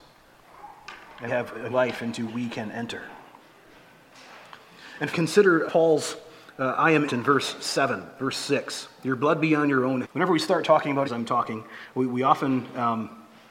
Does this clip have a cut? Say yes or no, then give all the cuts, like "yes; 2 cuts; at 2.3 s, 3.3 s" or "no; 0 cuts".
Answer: yes; 8 cuts; at 1.3 s, 1.7 s, 2.3 s, 5.1 s, 5.7 s, 7.1 s, 10.0 s, 11.0 s